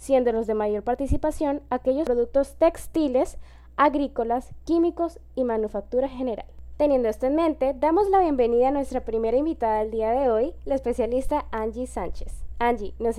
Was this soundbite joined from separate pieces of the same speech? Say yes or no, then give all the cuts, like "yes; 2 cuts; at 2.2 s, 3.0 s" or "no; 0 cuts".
no; 0 cuts